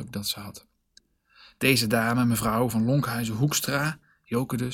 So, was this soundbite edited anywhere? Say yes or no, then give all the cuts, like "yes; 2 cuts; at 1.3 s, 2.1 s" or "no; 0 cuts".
no; 0 cuts